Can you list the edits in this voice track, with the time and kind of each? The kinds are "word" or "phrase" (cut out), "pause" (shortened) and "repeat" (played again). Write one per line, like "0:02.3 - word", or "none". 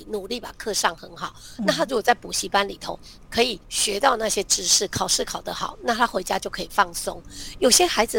0:03.6 - pause

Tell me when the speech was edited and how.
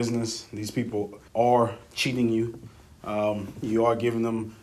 0:01.3 - pause

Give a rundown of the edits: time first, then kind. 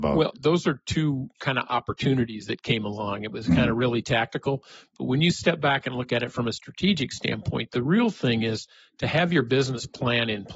none

